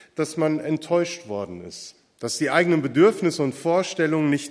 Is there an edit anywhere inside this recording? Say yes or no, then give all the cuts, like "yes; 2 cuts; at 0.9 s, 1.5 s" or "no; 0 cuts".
no; 0 cuts